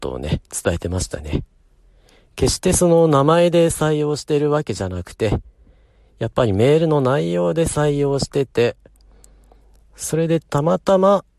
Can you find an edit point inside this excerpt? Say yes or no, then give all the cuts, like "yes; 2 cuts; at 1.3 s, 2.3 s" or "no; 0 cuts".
no; 0 cuts